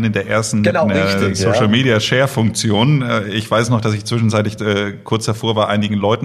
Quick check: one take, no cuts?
yes; 0 cuts

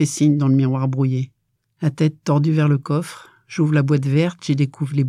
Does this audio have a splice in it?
yes; 1 cut; at 1.6 s

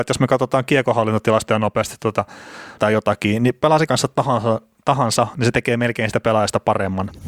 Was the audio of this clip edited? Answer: yes; 2 cuts; at 2.8 s, 3.9 s

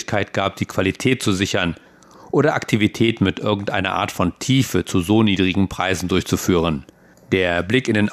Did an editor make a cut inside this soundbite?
no; 0 cuts

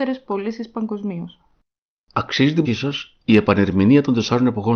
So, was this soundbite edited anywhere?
yes; 1 cut; at 2.6 s

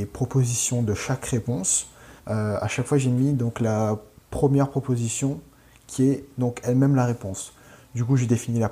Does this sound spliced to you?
yes; 1 cut; at 2.2 s

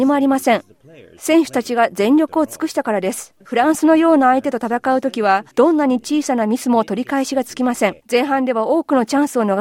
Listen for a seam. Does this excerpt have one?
yes; 3 cuts; at 3.4 s, 5.5 s, 8.0 s

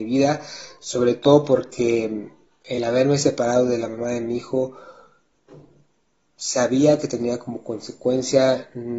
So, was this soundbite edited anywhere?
no; 0 cuts

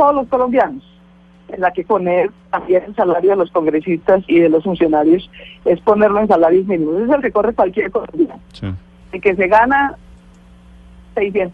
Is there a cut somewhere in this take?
yes; 4 cuts; at 1.9 s, 4.3 s, 4.6 s, 7.2 s

